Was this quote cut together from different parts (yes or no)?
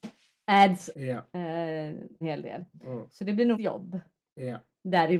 yes